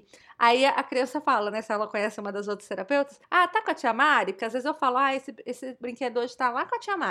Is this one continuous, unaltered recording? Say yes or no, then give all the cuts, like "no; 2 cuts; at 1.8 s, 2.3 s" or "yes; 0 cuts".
no; 1 cut; at 3.2 s